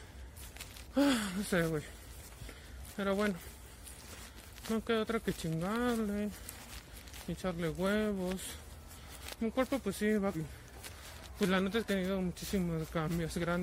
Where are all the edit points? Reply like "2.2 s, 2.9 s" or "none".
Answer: 10.3 s, 11.9 s